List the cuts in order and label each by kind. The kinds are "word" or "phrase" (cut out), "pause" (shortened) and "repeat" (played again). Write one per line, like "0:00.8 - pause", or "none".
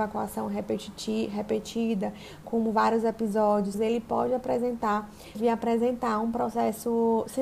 0:02.4 - word
0:03.7 - word
0:05.3 - word